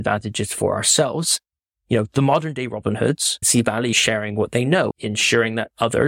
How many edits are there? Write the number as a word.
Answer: three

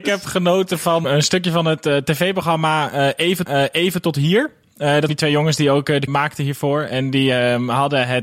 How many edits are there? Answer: four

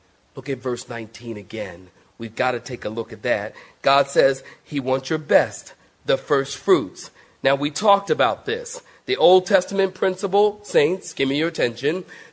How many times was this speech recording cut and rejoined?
zero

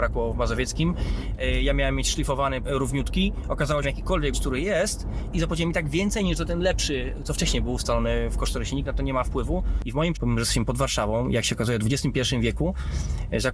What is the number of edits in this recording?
five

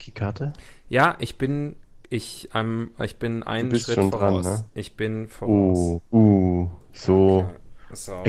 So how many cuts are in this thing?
zero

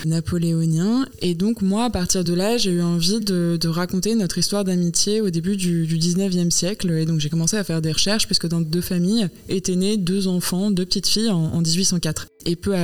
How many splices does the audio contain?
zero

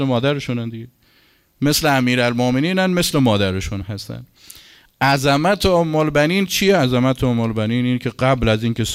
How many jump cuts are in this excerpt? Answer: zero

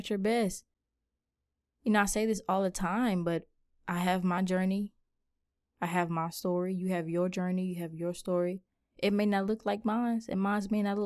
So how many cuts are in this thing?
zero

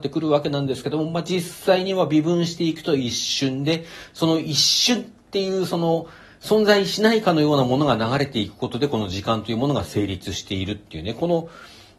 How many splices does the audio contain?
zero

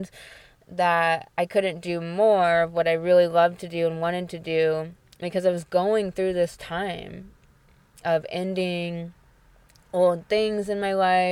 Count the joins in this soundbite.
zero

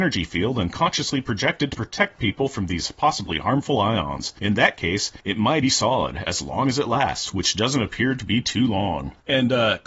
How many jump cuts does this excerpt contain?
one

